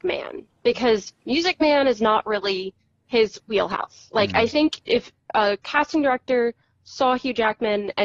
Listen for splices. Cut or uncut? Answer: uncut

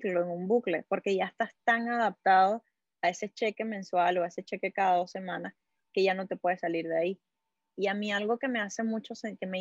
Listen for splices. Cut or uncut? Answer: uncut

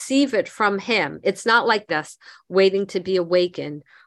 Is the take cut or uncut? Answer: cut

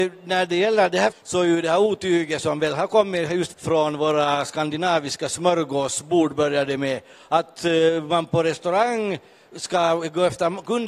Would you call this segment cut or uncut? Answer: cut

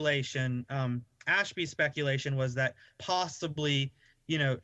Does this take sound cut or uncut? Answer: uncut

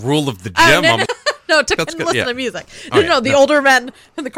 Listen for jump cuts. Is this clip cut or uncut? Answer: cut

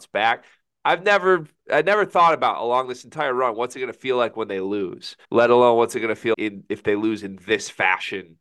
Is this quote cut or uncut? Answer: cut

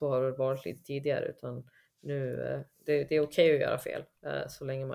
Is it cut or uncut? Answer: uncut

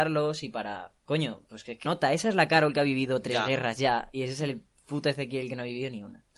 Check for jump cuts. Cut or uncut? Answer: cut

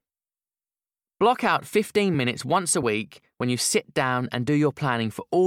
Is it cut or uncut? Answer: uncut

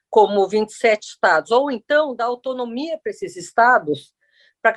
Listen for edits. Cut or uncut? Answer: uncut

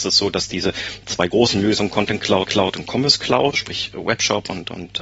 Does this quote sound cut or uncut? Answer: cut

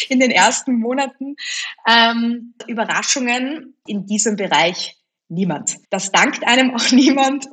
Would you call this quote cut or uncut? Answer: cut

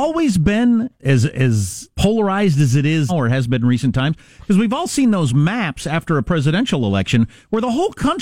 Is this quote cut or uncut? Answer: cut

